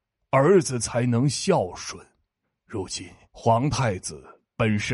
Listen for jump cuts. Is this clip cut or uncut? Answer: cut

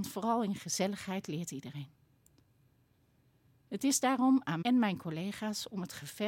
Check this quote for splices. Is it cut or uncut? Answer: cut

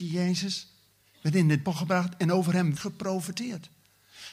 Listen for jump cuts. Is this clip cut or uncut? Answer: cut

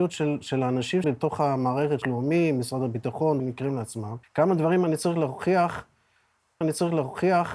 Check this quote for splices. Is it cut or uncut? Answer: cut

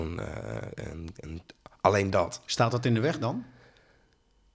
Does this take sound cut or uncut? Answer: uncut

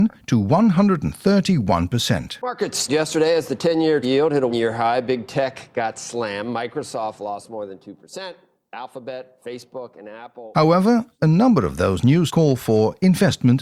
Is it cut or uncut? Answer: cut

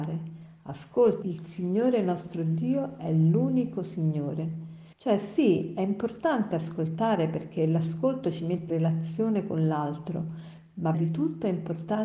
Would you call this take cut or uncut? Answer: cut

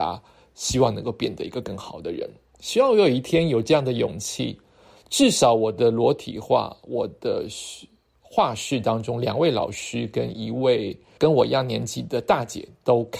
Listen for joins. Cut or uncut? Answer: cut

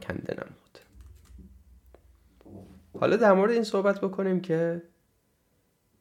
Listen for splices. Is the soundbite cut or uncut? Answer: uncut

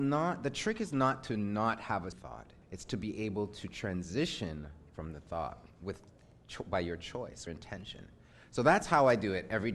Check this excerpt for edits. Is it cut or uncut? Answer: cut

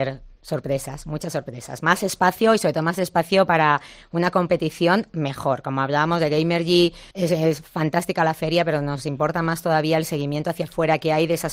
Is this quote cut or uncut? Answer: cut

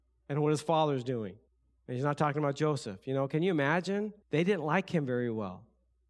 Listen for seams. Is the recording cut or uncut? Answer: cut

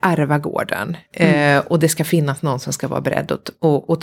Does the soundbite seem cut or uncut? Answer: uncut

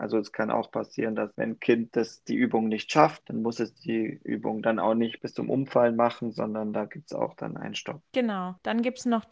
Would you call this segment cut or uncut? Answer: cut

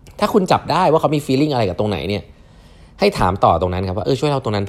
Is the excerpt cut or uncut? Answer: uncut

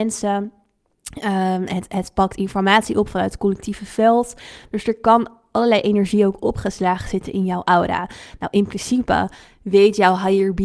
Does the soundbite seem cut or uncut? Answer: uncut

